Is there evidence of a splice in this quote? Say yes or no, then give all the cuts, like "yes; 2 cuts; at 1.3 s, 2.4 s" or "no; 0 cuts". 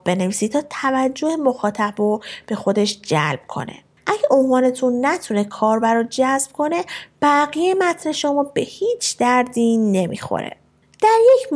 no; 0 cuts